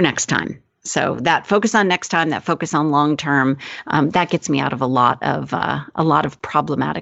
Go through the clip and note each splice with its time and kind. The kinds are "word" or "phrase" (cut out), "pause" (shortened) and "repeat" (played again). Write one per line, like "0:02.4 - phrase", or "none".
none